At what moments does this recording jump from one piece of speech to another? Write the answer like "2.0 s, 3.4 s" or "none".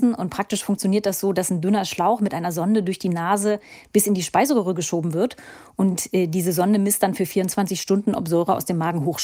none